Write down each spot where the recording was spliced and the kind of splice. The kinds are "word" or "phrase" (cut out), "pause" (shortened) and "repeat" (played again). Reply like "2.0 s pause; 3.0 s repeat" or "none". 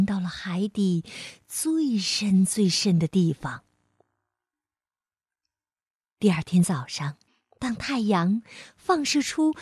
7.3 s pause